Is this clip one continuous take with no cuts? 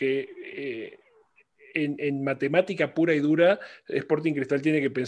yes; 0 cuts

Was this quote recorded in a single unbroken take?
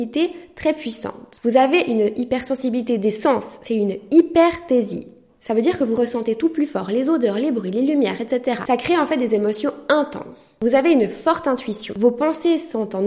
yes; 0 cuts

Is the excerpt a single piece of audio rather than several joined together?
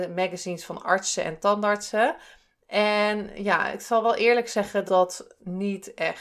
no; 1 cut; at 4.9 s

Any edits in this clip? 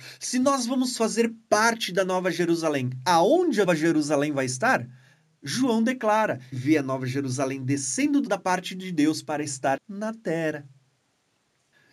yes; 4 cuts; at 3.6 s, 6.5 s, 8.3 s, 9.8 s

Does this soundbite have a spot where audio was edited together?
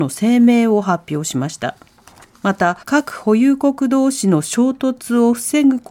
yes; 2 cuts; at 2.1 s, 2.8 s

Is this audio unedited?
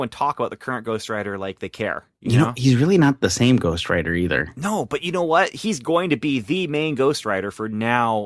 no; 1 cut; at 2.1 s

